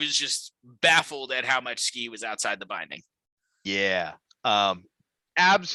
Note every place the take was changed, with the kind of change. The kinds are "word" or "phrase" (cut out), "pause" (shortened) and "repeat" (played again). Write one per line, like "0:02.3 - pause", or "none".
none